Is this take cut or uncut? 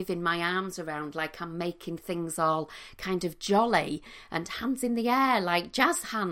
uncut